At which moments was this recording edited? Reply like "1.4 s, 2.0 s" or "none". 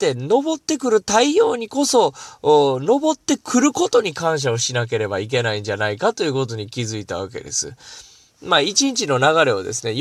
none